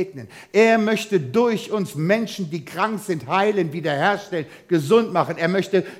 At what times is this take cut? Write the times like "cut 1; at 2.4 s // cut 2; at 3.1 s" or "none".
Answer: none